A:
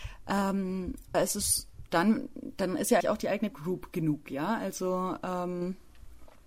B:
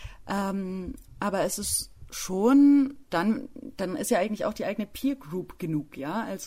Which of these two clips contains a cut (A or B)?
A